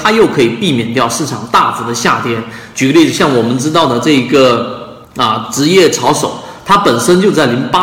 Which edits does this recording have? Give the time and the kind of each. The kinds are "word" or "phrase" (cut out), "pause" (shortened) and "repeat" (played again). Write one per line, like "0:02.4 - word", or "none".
0:05.0 - pause